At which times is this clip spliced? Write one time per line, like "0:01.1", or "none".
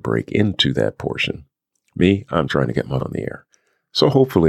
0:02.5
0:03.0